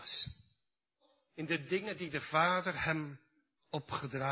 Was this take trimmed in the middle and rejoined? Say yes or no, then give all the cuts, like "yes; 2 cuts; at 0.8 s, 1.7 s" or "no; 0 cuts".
no; 0 cuts